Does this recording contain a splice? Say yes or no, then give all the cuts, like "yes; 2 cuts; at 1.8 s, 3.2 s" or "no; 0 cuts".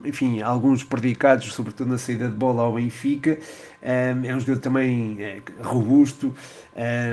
no; 0 cuts